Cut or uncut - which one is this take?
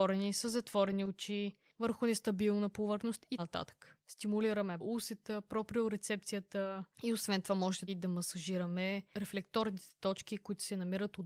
cut